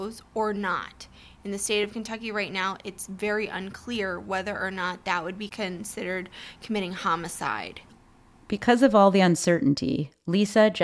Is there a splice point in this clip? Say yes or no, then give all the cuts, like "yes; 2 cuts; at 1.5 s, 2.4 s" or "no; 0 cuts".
no; 0 cuts